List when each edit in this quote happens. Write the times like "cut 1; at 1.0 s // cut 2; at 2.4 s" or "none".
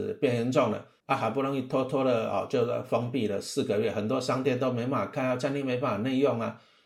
cut 1; at 1.0 s